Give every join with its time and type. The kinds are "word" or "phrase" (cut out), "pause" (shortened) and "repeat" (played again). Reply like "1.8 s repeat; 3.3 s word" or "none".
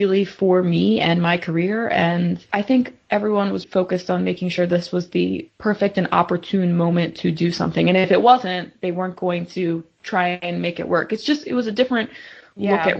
3.6 s word